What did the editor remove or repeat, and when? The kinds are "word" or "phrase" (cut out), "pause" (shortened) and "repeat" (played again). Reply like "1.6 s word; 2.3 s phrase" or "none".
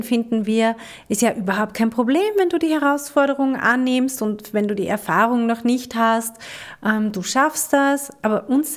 none